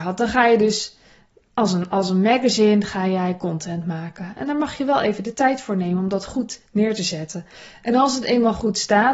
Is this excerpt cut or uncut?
uncut